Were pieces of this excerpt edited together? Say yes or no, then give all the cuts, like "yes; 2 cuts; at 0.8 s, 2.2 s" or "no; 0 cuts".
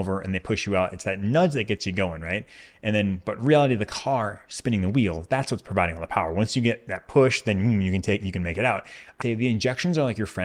yes; 1 cut; at 9.2 s